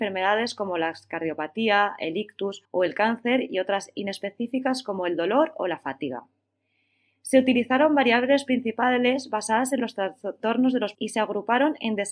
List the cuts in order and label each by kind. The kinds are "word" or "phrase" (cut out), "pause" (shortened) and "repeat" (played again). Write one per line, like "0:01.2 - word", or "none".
0:02.6 - pause
0:10.9 - word

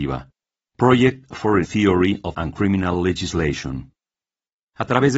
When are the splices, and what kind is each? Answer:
0:01.6 - word
0:02.3 - word

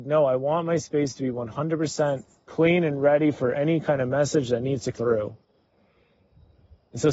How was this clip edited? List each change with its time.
0:04.9 - word

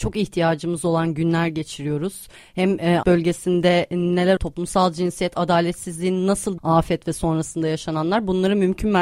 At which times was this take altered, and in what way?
0:03.0 - word
0:04.4 - word
0:06.6 - word

